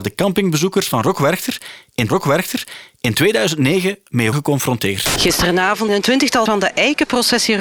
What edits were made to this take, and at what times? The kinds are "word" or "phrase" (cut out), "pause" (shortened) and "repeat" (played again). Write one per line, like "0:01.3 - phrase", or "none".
0:02.1 - repeat
0:04.3 - word
0:05.9 - word
0:06.5 - word